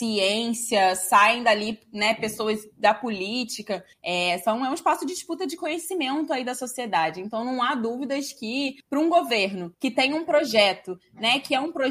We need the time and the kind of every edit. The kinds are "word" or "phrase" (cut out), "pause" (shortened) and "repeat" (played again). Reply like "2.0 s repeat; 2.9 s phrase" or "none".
3.9 s pause; 8.8 s pause; 9.7 s pause